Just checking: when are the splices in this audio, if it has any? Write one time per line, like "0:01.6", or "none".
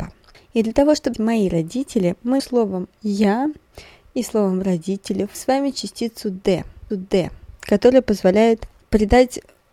0:01.1
0:02.4
0:05.3
0:06.9